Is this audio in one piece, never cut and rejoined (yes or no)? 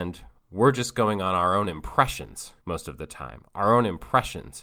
no